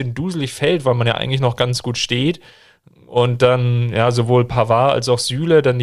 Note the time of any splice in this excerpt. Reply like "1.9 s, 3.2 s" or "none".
none